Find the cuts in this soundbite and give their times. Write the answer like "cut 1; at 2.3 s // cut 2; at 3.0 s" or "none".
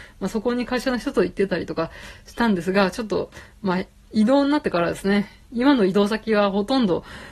none